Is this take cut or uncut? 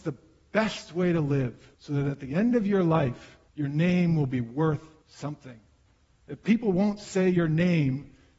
cut